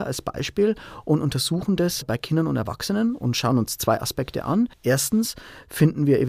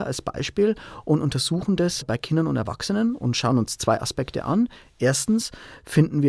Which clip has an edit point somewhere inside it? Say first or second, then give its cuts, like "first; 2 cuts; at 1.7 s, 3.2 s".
first; 1 cut; at 4.7 s